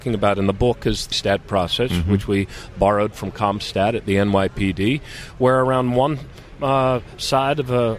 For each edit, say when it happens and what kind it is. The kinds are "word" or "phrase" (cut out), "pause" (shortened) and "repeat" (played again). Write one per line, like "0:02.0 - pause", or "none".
0:01.1 - word